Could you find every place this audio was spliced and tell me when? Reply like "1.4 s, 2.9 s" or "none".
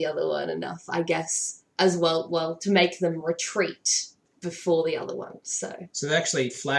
none